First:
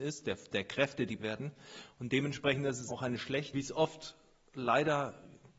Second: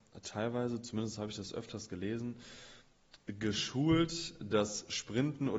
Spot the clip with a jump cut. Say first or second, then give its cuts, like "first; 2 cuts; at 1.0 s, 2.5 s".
first; 3 cuts; at 1.2 s, 2.9 s, 3.5 s